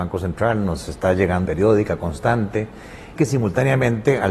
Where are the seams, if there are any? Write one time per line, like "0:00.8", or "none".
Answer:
0:01.5
0:03.2